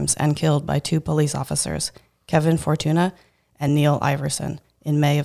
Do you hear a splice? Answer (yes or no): no